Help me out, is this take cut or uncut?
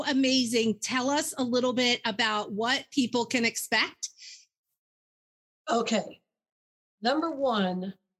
uncut